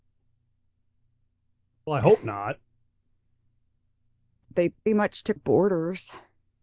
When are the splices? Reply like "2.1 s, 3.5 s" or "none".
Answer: 1.9 s, 4.4 s, 4.9 s, 5.4 s